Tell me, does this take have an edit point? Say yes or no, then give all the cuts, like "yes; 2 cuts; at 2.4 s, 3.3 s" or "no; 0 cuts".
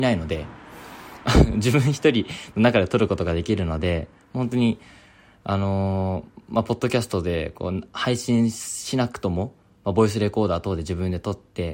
no; 0 cuts